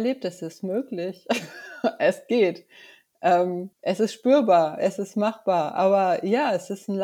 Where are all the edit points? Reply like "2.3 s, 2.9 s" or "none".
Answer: 3.7 s

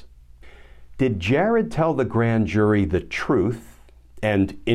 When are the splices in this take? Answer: none

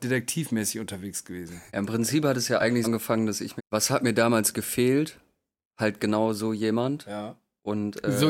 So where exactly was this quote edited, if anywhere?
1.7 s, 2.8 s, 3.6 s

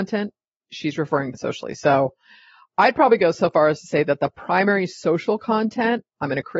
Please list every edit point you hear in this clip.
1.3 s

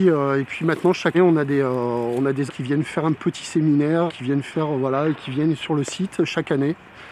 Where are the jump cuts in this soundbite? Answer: 1.1 s, 2.5 s, 4.1 s

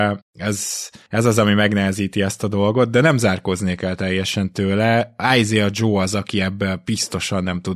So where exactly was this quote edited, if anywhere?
none

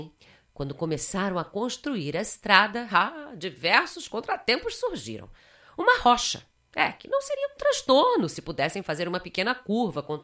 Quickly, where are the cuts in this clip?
none

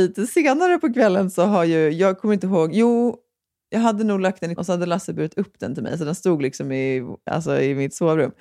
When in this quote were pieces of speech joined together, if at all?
4.6 s

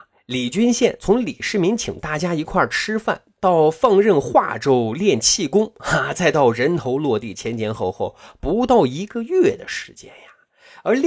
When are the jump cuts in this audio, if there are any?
none

